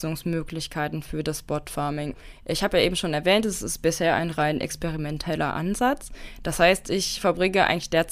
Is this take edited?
no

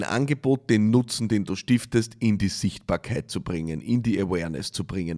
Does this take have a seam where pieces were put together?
no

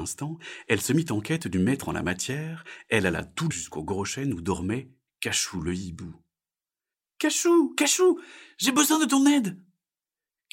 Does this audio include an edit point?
yes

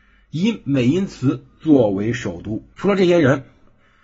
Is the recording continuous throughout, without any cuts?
no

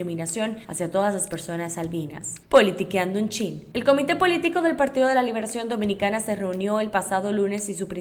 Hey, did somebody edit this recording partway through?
no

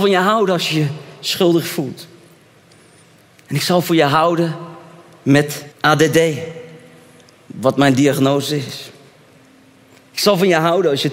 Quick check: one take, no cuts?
no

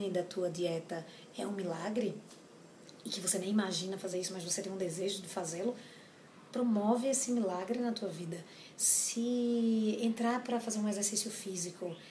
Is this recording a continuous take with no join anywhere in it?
yes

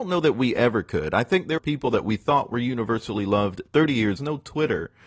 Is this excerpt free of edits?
no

